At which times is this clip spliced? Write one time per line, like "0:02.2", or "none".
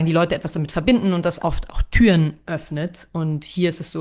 0:01.4